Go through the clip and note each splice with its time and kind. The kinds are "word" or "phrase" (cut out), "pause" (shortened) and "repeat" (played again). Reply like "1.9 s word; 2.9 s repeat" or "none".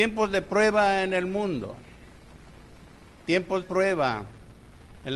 3.6 s word

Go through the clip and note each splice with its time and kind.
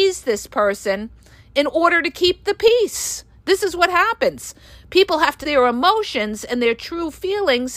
5.4 s word

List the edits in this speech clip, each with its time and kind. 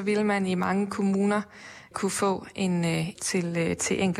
1.9 s word; 3.2 s phrase

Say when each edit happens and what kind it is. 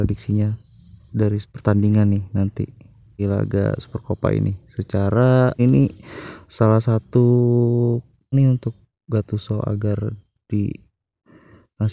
1.4 s word; 3.2 s word; 5.6 s word; 8.3 s word

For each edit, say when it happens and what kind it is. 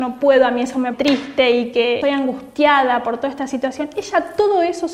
0.9 s word; 2.0 s word

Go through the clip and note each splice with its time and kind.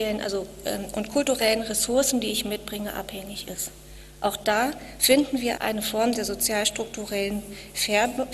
5.6 s word

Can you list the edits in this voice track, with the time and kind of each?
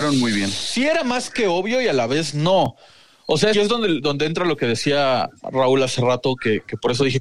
3.5 s phrase

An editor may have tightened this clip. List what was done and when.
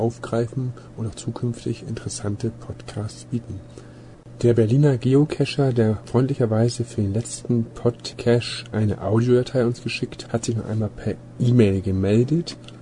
10.3 s word

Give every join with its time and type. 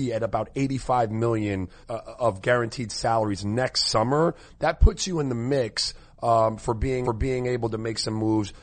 1.8 s word; 7.0 s repeat

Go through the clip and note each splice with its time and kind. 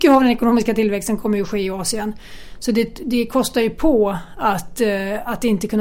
none

